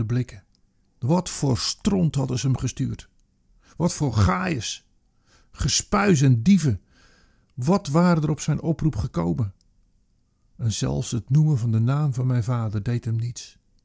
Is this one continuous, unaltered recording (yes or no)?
yes